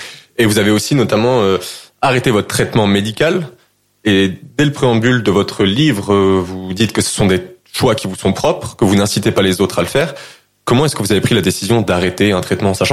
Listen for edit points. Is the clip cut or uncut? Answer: uncut